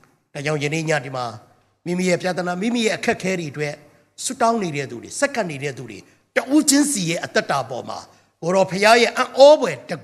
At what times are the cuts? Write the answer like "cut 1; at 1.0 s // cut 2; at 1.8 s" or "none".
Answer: none